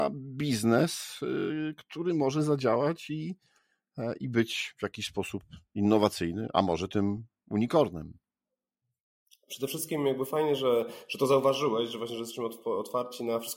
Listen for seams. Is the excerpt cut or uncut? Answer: uncut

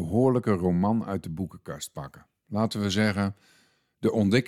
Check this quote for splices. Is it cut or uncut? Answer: uncut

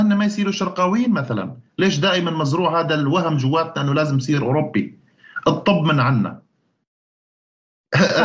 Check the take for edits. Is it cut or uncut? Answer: uncut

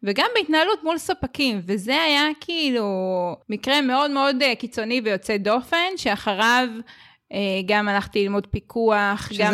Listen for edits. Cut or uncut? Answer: cut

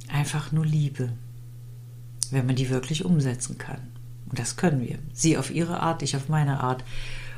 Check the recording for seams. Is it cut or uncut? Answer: uncut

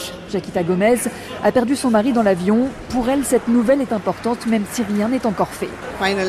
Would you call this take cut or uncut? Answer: uncut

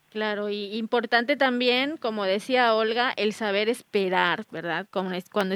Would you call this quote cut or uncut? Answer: uncut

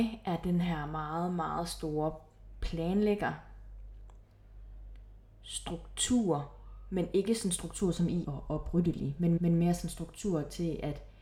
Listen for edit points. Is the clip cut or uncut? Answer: cut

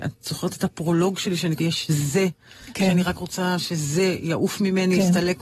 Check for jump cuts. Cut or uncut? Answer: cut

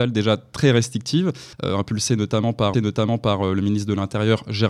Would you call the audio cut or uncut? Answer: cut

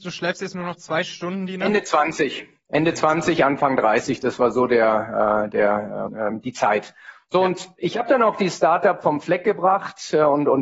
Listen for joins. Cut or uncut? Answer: cut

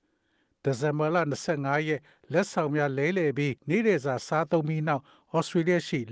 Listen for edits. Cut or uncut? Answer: cut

